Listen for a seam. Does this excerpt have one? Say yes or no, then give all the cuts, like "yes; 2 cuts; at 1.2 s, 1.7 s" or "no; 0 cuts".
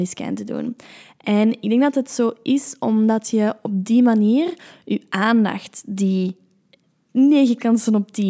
no; 0 cuts